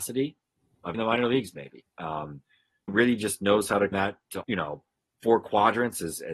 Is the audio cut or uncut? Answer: cut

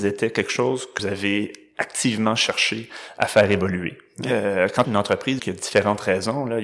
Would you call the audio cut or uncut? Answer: cut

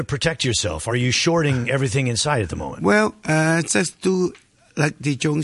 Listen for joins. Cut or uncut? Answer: uncut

